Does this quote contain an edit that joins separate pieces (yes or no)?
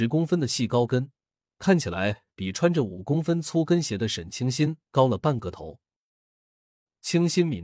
no